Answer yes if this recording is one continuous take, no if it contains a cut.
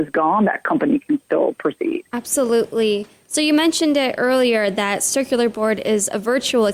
no